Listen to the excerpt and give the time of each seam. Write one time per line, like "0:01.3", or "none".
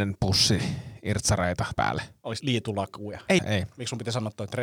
0:01.8
0:02.4
0:03.4